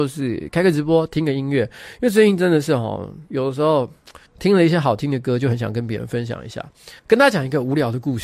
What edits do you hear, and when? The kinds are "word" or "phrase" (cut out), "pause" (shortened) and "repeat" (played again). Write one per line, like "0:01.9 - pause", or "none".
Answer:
0:04.3 - pause
0:07.0 - pause